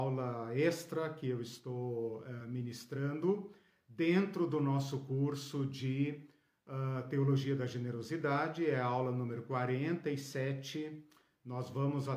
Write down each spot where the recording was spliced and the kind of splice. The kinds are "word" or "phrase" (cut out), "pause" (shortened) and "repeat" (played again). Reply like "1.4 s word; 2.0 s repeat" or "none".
none